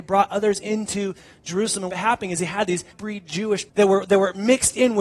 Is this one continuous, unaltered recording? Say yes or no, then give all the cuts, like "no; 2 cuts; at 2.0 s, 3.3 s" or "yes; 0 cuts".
no; 3 cuts; at 1.9 s, 2.9 s, 3.7 s